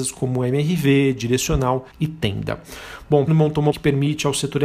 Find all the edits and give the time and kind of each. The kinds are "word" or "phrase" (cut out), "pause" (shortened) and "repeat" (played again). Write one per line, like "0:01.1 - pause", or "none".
0:01.9 - pause
0:03.3 - phrase
0:03.7 - word

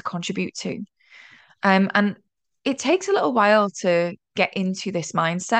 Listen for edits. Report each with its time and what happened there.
none

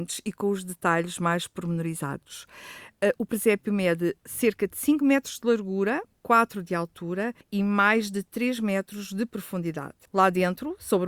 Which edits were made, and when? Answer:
0:07.4 - pause
0:10.1 - pause

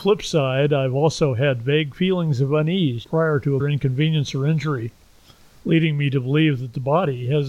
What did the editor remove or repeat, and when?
0:03.0 - word
0:03.6 - word

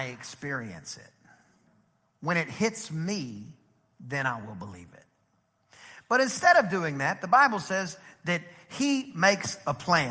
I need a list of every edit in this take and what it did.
none

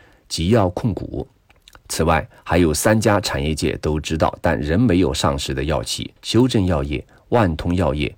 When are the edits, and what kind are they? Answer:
0:01.5 - pause
0:06.2 - pause

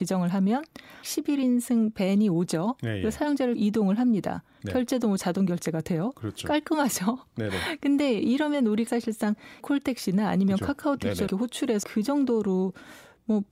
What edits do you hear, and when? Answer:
0:01.0 - word
0:03.6 - word
0:08.9 - word
0:09.6 - word
0:11.3 - word
0:11.8 - word

